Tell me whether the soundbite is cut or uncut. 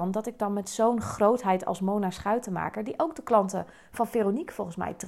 uncut